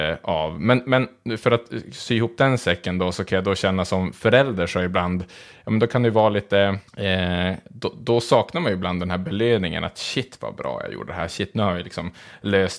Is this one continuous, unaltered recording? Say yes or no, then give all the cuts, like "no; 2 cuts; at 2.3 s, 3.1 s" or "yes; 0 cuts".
no; 1 cut; at 6.9 s